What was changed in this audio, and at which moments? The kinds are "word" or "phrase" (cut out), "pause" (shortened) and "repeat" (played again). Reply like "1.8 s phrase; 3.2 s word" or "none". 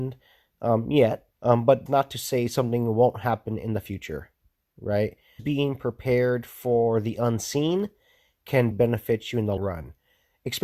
1.3 s pause; 1.9 s word; 5.4 s word; 8.7 s word; 9.6 s word

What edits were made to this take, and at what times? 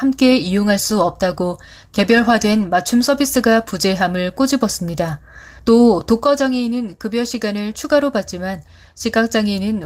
none

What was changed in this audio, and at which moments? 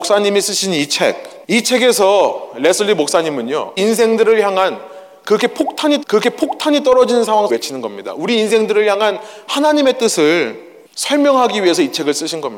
1.4 s pause; 3.8 s word; 6.0 s repeat; 7.5 s phrase; 10.9 s pause

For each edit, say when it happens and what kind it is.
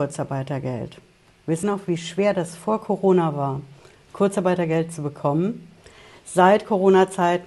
1.6 s word

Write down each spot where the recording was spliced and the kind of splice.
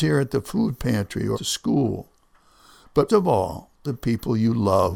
1.3 s word; 3.1 s word; 3.9 s word

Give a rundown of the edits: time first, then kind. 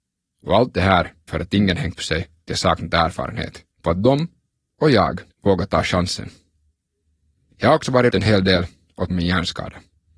1.3 s word; 2.0 s word; 2.5 s phrase; 3.7 s pause; 5.3 s pause; 8.1 s word; 9.1 s word

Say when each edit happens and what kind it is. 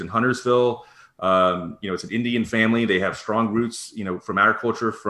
none

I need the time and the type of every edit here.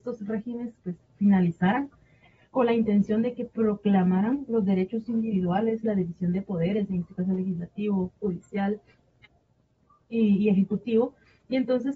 none

